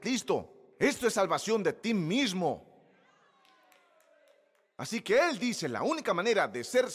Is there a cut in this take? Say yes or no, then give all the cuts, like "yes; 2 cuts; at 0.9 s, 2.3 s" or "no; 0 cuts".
no; 0 cuts